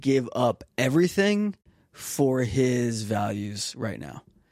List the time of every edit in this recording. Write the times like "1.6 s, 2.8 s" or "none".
none